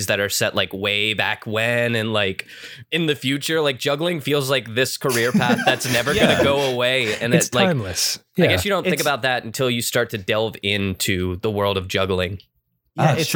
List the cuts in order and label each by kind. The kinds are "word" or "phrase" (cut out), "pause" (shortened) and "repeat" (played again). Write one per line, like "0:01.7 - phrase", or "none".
none